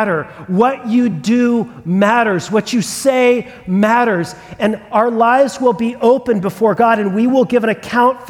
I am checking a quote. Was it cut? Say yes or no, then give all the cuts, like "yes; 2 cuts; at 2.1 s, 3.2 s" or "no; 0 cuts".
no; 0 cuts